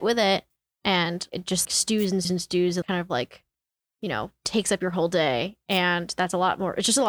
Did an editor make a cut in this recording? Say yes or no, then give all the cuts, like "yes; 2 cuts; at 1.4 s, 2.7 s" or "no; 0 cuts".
yes; 4 cuts; at 1.3 s, 1.6 s, 2.2 s, 2.8 s